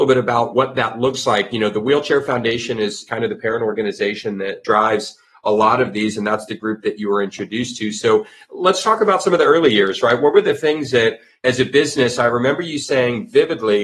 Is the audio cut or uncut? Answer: uncut